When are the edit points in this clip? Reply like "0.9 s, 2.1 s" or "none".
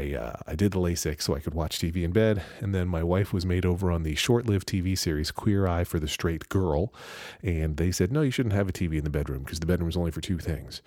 none